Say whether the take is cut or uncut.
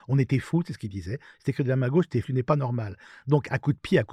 cut